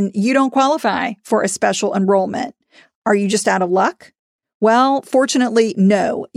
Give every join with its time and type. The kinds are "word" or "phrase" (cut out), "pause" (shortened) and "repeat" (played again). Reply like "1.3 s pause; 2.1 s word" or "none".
none